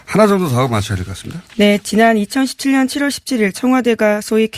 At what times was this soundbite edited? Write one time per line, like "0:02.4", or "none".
0:01.5